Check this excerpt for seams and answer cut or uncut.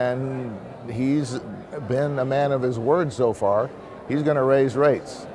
uncut